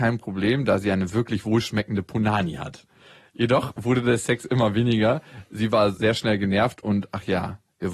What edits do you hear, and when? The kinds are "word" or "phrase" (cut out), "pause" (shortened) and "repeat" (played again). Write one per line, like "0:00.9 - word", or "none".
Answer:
none